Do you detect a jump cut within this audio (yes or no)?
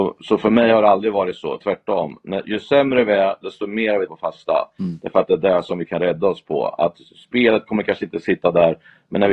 yes